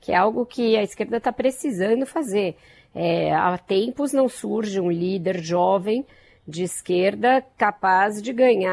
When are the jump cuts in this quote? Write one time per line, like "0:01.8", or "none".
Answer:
none